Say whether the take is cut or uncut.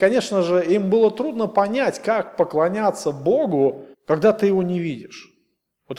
cut